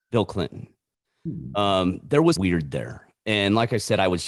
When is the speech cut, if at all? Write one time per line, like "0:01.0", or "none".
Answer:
0:02.4